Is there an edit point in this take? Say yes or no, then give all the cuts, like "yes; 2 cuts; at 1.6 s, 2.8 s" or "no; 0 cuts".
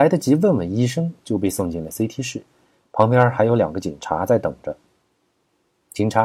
no; 0 cuts